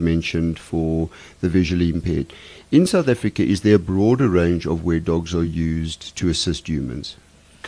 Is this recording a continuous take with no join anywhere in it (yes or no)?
yes